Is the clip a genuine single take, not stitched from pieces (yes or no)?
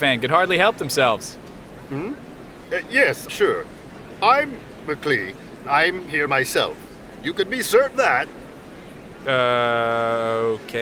no